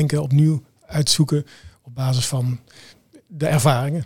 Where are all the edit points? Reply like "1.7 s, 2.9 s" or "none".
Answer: none